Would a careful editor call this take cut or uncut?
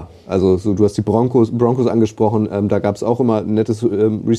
uncut